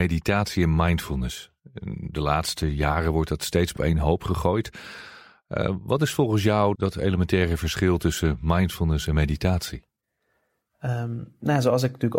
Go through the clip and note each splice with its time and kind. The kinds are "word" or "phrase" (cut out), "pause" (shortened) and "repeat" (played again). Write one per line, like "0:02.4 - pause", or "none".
0:03.8 - word
0:06.7 - word